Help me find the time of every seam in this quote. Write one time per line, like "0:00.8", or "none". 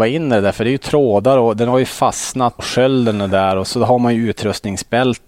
0:02.6